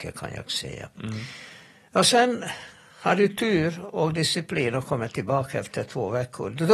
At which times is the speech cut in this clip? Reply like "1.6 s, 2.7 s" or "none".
none